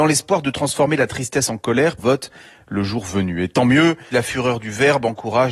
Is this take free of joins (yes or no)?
no